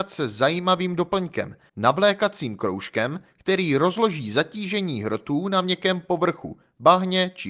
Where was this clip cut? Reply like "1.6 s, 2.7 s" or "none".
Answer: 1.7 s